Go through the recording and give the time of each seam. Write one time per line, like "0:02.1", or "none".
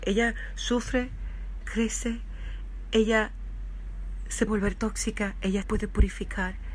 0:01.6
0:04.5
0:05.6